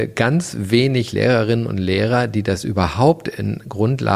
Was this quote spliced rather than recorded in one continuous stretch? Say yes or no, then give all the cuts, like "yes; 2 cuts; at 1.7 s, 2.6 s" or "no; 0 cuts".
no; 0 cuts